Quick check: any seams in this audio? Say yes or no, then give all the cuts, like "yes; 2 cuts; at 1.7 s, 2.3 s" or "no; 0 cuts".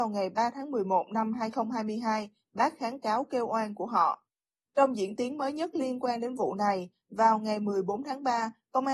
no; 0 cuts